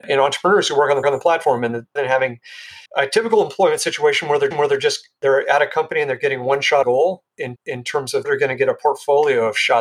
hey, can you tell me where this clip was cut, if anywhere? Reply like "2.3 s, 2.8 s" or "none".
1.0 s, 2.0 s, 2.9 s, 4.5 s, 6.8 s, 7.6 s, 8.2 s